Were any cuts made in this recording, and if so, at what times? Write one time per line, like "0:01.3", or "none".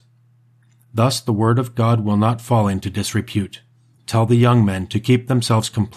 0:03.9